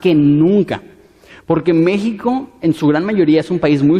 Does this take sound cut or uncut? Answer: uncut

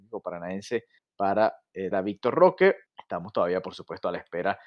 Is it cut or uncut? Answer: cut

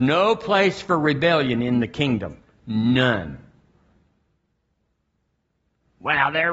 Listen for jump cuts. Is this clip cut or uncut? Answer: uncut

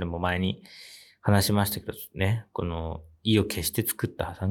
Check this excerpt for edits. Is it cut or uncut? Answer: uncut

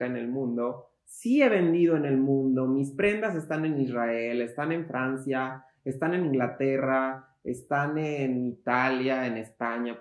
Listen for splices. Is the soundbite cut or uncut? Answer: uncut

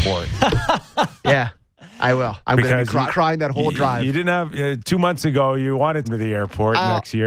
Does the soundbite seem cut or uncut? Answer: cut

